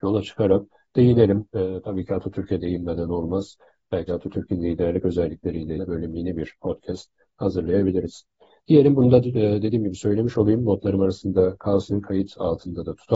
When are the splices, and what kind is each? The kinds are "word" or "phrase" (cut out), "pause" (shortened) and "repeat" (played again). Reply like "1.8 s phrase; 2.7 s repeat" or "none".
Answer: 4.1 s word; 5.8 s word